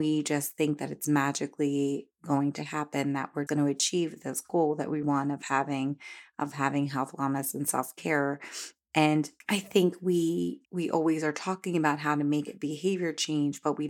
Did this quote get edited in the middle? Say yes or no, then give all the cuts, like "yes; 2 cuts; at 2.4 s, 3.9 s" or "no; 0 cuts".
yes; 4 cuts; at 3.5 s, 5.0 s, 9.4 s, 10.6 s